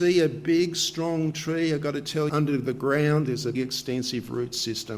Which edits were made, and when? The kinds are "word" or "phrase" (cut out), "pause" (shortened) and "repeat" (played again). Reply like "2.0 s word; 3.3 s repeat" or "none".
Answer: 2.3 s word; 3.5 s word